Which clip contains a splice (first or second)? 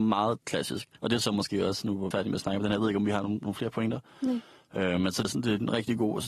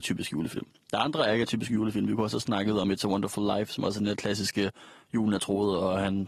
first